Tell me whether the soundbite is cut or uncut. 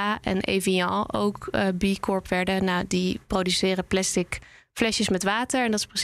uncut